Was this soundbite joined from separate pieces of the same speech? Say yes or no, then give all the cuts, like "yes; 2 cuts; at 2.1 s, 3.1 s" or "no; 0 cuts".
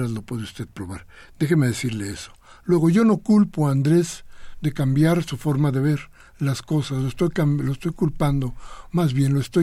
no; 0 cuts